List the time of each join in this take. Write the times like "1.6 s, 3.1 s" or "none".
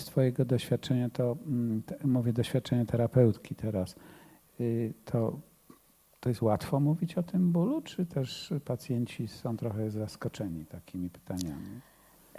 none